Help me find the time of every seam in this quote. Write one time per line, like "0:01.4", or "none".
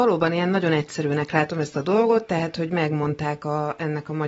none